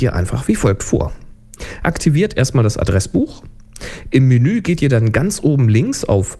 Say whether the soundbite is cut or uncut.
uncut